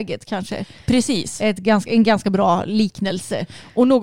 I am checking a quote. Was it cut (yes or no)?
no